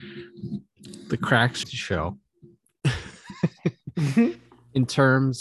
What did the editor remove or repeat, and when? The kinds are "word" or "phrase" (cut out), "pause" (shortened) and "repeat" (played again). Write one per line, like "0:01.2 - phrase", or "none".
0:01.6 - phrase